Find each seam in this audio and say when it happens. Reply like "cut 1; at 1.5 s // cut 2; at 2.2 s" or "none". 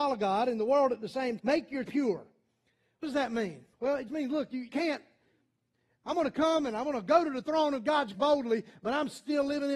cut 1; at 1.4 s // cut 2; at 1.9 s // cut 3; at 3.0 s // cut 4; at 3.7 s // cut 5; at 4.1 s // cut 6; at 4.7 s // cut 7; at 8.1 s